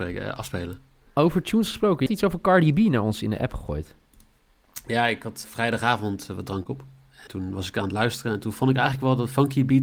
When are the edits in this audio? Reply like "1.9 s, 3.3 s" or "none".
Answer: 2.1 s, 5.4 s, 7.3 s